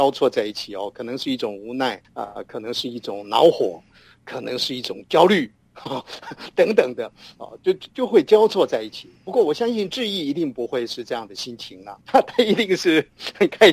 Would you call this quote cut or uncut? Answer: cut